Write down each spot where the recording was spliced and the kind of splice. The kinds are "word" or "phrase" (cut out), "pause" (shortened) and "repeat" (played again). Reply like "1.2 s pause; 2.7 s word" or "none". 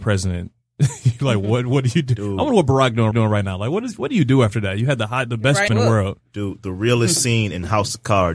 3.1 s repeat; 5.7 s word